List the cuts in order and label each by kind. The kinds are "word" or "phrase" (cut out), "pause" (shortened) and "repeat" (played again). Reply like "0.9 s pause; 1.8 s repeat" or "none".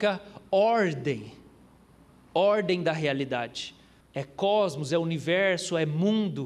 4.0 s pause